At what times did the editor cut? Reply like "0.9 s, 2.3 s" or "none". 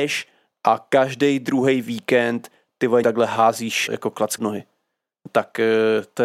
3.0 s, 3.9 s, 4.4 s